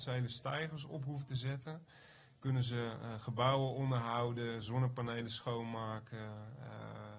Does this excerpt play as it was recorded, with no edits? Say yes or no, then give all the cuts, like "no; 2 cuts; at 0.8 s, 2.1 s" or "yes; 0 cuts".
yes; 0 cuts